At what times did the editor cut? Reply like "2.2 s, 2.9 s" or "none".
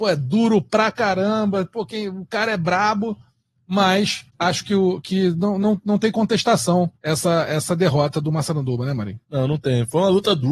4.3 s, 7.0 s, 9.2 s